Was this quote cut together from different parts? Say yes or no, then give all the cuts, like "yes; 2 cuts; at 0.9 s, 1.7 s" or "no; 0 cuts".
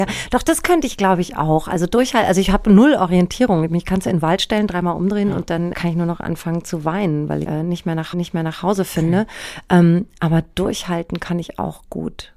yes; 3 cuts; at 5.7 s, 7.4 s, 8.1 s